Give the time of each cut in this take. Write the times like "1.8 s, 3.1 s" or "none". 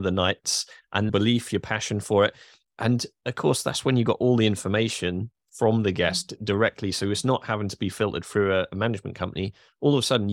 1.1 s